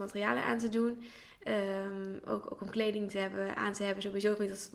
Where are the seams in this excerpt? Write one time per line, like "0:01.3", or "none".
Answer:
none

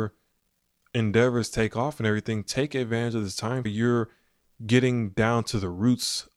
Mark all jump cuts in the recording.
0:03.7

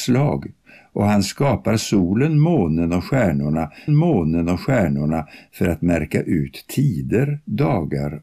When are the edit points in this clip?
0:03.9

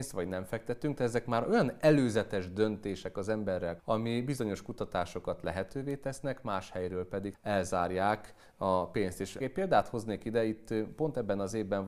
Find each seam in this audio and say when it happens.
0:03.8
0:07.3
0:09.4

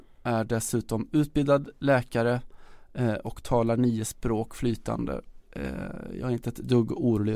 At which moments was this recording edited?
none

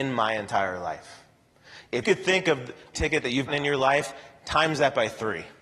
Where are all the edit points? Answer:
0:02.0
0:02.9
0:03.5

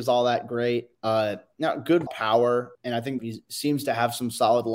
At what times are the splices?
0:00.9
0:02.1
0:02.7
0:03.2

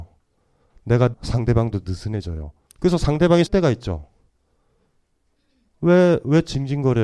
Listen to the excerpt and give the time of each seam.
0:01.1
0:02.7
0:03.5

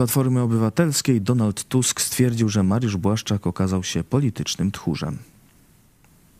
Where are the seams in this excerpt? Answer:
none

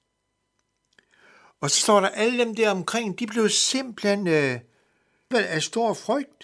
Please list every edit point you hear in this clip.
0:05.3

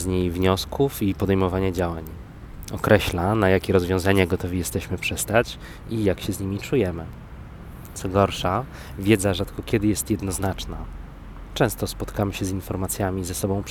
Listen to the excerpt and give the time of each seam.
none

